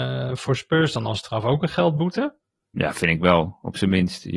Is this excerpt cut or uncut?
uncut